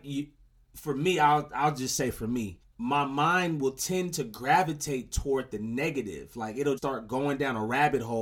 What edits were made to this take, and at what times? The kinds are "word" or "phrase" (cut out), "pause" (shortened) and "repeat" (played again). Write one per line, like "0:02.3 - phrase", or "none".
0:02.6 - pause
0:06.8 - word